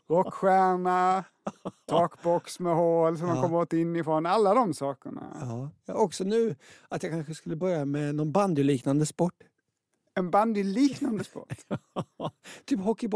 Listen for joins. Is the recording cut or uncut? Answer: uncut